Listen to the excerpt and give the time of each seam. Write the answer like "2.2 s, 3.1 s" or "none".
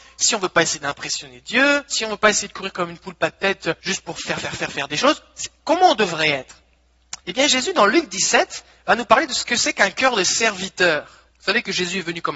1.9 s, 3.8 s, 7.2 s, 11.3 s